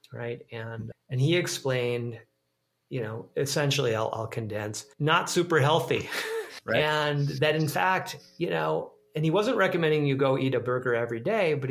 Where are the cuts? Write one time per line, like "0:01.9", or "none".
0:00.9
0:04.9
0:06.6